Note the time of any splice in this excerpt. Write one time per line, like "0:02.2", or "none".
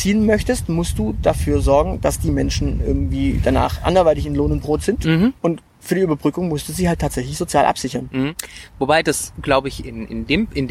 0:05.4